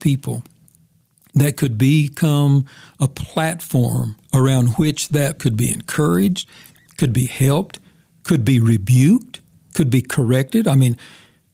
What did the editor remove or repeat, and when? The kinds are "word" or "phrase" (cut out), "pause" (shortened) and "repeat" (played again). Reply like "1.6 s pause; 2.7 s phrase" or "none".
4.2 s pause; 5.4 s word